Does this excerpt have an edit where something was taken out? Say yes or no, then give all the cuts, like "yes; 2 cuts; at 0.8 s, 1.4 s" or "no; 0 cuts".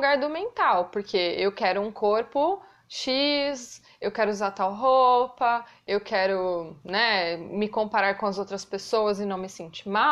no; 0 cuts